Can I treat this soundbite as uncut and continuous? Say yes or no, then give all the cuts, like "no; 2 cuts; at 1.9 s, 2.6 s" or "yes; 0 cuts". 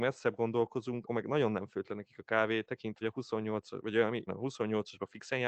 no; 3 cuts; at 1.1 s, 3.0 s, 4.3 s